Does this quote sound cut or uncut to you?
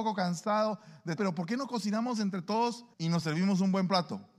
cut